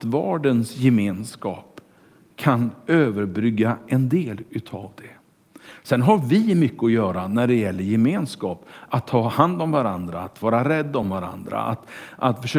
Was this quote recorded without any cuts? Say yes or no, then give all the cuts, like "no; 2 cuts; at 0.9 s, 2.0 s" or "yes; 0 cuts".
yes; 0 cuts